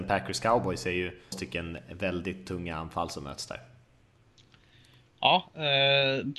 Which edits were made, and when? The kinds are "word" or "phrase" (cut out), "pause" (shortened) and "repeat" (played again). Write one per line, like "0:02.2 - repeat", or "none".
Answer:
0:01.3 - word